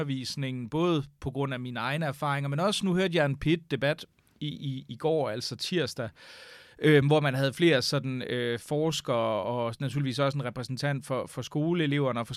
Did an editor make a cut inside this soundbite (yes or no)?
no